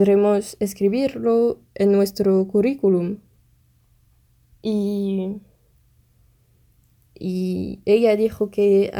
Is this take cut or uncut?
uncut